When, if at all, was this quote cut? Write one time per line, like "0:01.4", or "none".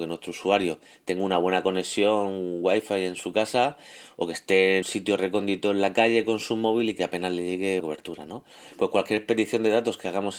0:04.8
0:07.8